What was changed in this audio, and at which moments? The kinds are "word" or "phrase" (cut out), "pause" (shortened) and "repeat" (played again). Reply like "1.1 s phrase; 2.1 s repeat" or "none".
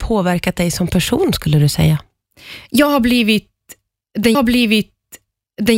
4.3 s repeat